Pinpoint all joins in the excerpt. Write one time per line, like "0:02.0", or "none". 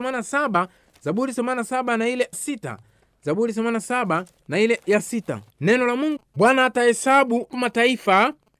0:02.3
0:04.8
0:05.5
0:06.2
0:07.5